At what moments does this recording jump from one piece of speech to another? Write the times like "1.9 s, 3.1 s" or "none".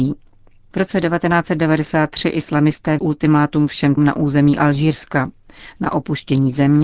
3.0 s, 4.0 s